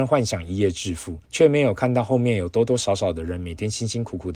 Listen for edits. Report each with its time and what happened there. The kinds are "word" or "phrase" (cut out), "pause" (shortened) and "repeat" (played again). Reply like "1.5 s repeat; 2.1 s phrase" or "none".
1.2 s pause